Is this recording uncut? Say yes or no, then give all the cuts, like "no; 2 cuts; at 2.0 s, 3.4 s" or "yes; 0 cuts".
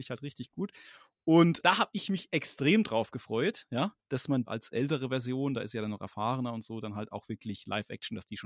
no; 3 cuts; at 1.6 s, 4.0 s, 4.5 s